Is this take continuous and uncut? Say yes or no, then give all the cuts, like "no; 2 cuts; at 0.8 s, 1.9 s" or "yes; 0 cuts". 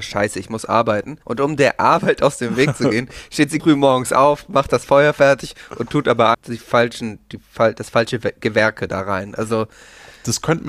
no; 3 cuts; at 1.2 s, 3.6 s, 6.3 s